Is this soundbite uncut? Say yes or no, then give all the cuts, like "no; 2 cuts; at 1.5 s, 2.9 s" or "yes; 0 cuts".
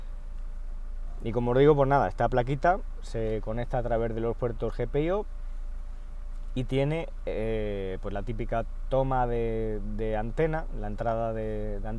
yes; 0 cuts